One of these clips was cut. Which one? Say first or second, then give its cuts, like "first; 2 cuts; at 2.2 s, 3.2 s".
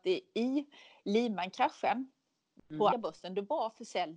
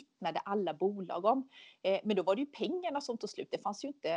first; 1 cut; at 2.9 s